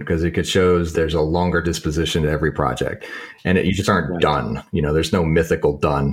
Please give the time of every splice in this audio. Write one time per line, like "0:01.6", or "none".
0:00.9
0:01.6